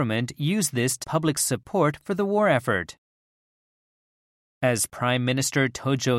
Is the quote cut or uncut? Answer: cut